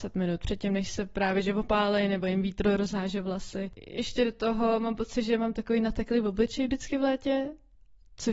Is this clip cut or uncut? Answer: uncut